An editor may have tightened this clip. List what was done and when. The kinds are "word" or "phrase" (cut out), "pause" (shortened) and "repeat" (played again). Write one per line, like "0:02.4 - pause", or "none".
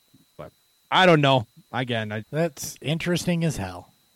0:02.2 - word